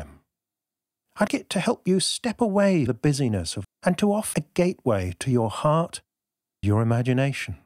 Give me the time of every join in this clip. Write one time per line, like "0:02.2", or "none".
0:01.3
0:02.9
0:03.6
0:04.3
0:06.6